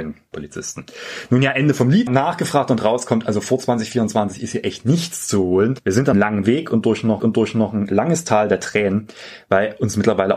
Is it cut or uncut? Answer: cut